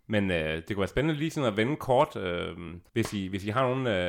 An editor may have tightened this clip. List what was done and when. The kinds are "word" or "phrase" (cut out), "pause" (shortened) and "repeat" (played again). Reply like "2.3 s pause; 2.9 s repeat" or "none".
2.9 s pause